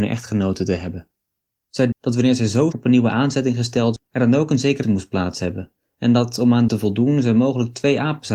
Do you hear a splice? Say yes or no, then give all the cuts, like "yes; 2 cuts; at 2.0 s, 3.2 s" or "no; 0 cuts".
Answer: yes; 5 cuts; at 1.9 s, 2.7 s, 4.0 s, 4.8 s, 6.7 s